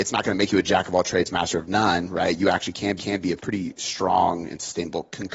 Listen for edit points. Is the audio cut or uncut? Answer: cut